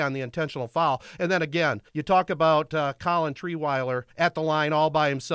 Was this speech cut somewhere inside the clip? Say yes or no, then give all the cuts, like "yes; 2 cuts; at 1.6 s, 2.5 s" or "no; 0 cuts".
yes; 2 cuts; at 1.9 s, 4.1 s